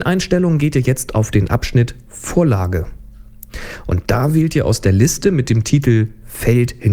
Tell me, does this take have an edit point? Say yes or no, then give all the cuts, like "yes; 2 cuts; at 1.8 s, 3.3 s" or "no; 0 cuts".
no; 0 cuts